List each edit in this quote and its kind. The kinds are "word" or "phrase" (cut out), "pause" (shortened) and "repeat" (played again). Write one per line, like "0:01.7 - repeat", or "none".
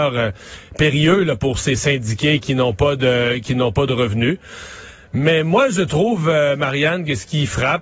none